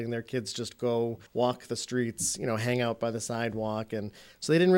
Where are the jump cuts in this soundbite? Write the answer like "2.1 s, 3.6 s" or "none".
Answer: 1.3 s